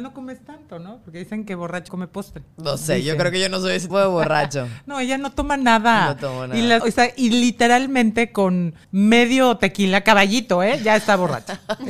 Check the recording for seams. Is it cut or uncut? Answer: cut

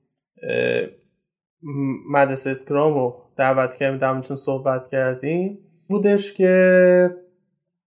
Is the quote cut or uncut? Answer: cut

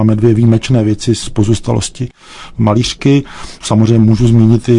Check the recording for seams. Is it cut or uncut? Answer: cut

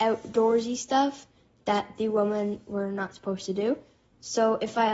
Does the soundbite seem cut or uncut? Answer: uncut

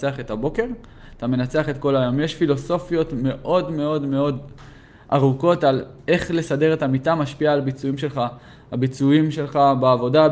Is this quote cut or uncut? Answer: uncut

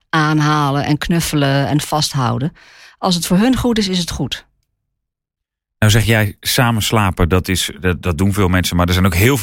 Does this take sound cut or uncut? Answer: uncut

